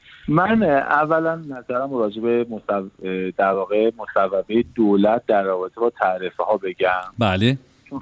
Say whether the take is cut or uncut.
uncut